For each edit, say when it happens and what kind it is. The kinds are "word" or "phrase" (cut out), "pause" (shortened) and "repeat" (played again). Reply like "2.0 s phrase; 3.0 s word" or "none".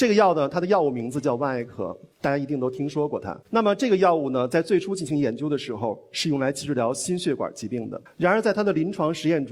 2.1 s pause; 3.4 s pause; 8.1 s pause